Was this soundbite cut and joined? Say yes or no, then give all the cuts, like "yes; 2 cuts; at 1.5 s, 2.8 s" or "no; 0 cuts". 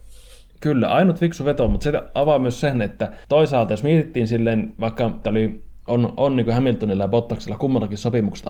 yes; 2 cuts; at 3.2 s, 5.2 s